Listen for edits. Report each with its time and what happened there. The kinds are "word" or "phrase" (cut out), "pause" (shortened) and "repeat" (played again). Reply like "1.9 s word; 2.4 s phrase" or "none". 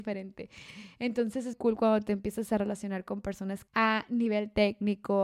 1.5 s word; 3.7 s word